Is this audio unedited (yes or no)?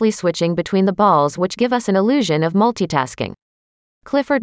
yes